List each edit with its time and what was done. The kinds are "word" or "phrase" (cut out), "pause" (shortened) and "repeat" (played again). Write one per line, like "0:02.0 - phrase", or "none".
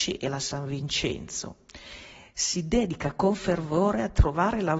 none